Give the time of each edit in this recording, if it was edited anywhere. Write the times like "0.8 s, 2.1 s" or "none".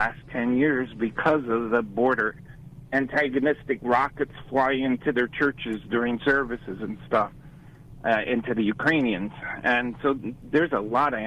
none